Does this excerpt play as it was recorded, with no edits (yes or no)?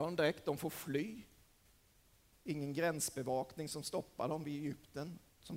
yes